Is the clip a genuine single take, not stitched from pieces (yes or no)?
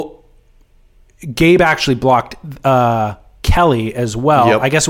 yes